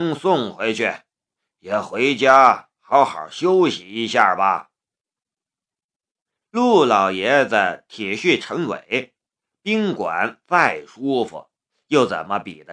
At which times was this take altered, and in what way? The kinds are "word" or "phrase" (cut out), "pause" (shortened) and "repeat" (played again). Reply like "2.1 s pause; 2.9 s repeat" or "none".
none